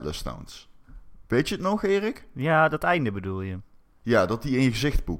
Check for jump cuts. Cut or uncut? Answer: uncut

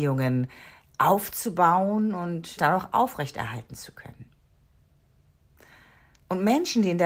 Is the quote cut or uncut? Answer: cut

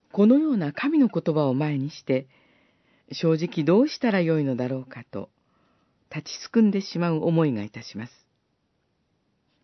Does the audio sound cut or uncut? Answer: uncut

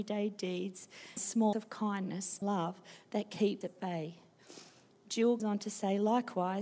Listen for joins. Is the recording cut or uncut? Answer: cut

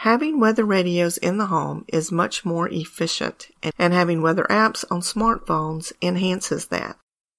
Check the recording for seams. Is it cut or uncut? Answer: cut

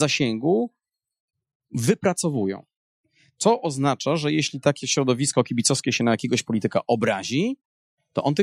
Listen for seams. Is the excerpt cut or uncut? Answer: uncut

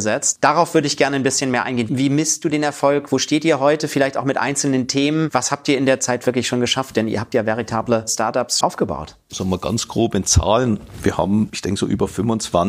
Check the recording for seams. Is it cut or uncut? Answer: cut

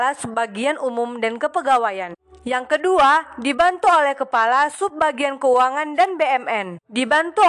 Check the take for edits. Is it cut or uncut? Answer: uncut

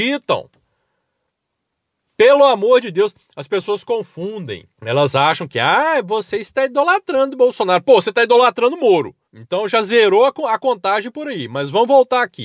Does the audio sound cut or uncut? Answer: cut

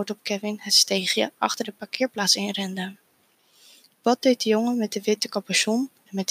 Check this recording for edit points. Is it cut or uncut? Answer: uncut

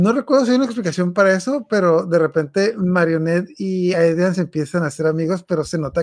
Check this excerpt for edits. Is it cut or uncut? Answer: uncut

